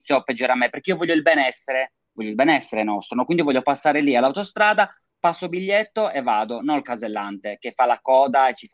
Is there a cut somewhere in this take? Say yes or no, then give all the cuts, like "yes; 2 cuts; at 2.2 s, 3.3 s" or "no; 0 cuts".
no; 0 cuts